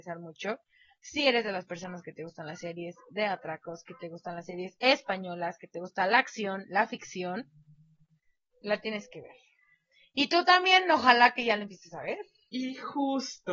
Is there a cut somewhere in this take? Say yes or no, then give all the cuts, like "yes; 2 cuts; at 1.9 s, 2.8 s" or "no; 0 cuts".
no; 0 cuts